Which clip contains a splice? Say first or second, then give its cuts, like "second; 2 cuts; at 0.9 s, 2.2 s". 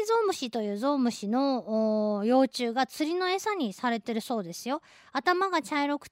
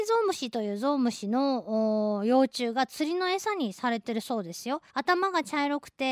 second; 1 cut; at 4.9 s